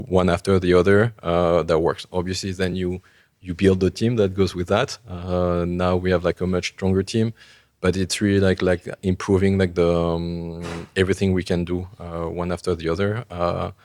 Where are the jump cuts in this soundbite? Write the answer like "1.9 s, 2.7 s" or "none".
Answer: none